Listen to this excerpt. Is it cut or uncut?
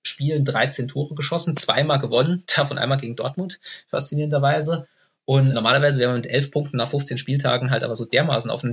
cut